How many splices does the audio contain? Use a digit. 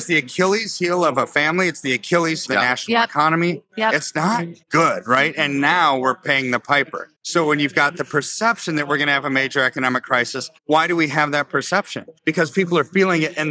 5